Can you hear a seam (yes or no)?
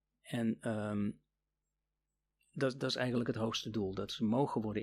no